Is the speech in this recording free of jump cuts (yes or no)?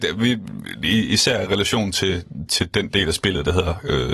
no